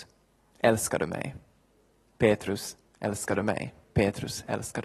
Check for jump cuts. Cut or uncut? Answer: uncut